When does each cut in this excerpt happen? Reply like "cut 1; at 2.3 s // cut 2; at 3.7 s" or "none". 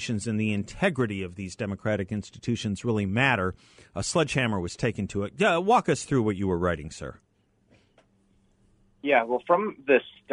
none